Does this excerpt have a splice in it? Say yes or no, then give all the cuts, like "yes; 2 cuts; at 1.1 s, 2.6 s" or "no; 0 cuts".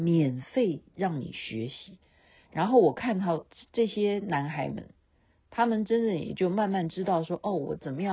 no; 0 cuts